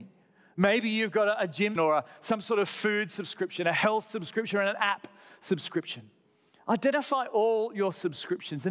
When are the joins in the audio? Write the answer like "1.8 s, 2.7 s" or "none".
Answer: 1.8 s